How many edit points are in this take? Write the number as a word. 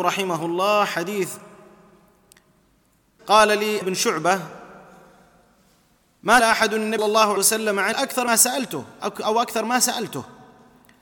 seven